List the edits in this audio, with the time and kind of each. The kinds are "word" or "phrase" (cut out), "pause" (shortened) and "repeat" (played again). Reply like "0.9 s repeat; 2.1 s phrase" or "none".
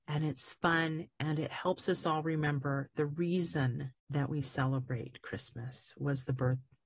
4.0 s pause